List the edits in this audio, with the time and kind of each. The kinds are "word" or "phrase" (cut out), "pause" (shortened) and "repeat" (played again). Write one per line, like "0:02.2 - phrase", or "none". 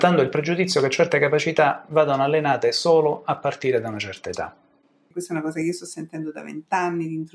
none